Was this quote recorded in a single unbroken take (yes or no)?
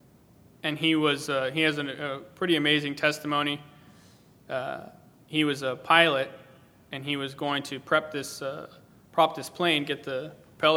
yes